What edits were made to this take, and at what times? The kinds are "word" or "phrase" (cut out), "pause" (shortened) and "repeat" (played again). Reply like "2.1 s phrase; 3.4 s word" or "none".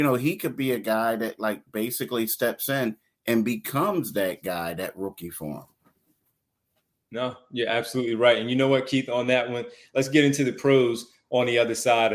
none